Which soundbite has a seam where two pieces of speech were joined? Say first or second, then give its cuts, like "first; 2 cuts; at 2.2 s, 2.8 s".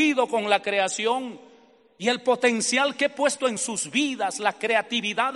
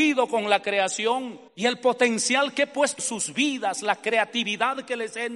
second; 2 cuts; at 1.5 s, 3.0 s